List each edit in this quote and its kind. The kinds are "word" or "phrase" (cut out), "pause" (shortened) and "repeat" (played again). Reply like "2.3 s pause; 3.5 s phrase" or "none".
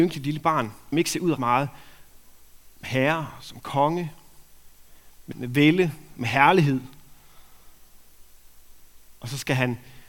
0.9 s word; 1.4 s word; 2.8 s word; 5.3 s word